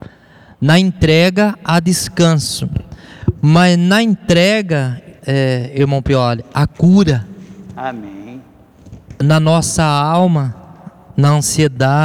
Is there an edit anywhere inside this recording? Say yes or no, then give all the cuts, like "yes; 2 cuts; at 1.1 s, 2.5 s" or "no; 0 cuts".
yes; 1 cut; at 5.2 s